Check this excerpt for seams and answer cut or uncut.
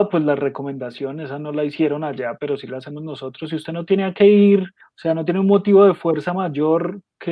cut